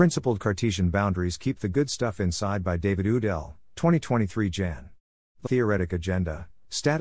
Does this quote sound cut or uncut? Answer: cut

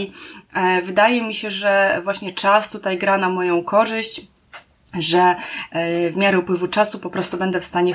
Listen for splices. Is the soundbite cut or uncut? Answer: uncut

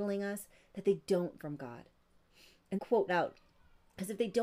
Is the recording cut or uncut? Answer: cut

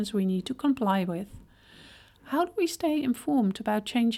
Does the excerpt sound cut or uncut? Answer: uncut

